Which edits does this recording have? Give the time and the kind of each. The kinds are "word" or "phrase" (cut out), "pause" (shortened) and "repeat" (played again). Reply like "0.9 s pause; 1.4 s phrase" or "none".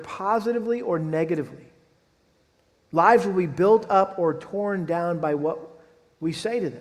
none